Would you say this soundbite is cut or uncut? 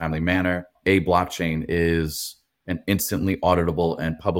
uncut